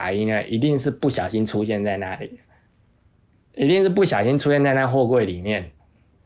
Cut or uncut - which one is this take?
uncut